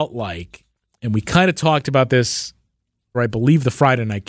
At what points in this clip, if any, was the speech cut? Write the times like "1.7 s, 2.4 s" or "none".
3.1 s